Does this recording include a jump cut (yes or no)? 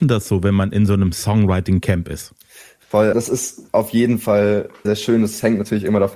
yes